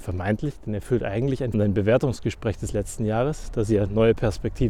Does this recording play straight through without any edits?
no; 1 cut; at 1.5 s

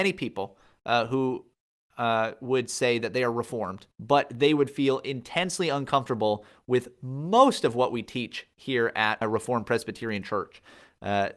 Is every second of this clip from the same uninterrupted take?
no; 2 cuts; at 3.9 s, 9.2 s

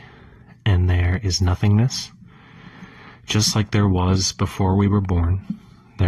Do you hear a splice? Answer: no; 0 cuts

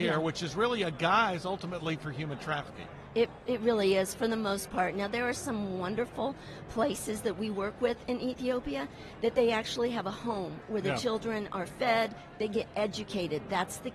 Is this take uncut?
yes; 0 cuts

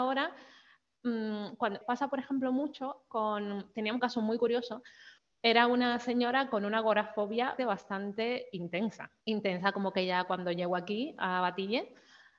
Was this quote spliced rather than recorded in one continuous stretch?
yes; 5 cuts; at 1.8 s, 4.0 s, 5.2 s, 7.6 s, 9.2 s

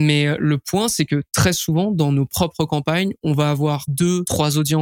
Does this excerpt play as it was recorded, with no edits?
yes; 0 cuts

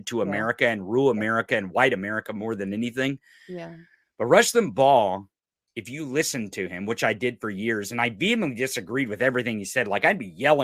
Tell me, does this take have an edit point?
no; 0 cuts

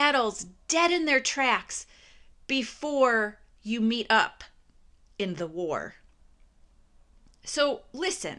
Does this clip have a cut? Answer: no; 0 cuts

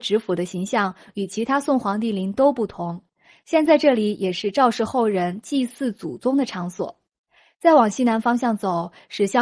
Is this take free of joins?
yes; 0 cuts

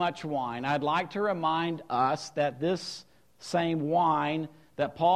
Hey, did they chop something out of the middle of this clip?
no; 0 cuts

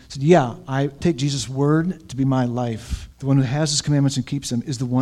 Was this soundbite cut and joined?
yes; 2 cuts; at 1.0 s, 3.1 s

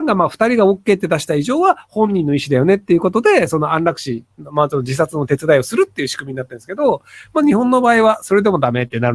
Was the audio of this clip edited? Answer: no; 0 cuts

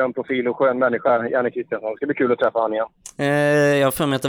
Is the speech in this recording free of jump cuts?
yes; 0 cuts

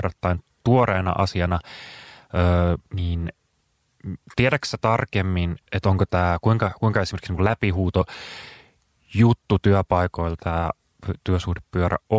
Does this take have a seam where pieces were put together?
yes; 2 cuts; at 2.9 s, 5.7 s

